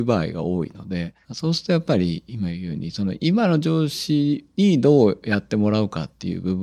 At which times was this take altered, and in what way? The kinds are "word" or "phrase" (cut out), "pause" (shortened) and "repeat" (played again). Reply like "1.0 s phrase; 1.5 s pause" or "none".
1.2 s pause